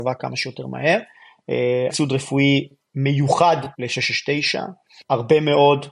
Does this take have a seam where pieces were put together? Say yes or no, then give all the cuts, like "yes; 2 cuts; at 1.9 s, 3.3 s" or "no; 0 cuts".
yes; 2 cuts; at 1.9 s, 3.7 s